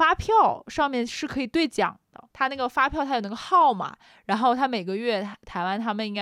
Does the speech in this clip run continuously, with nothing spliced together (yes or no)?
yes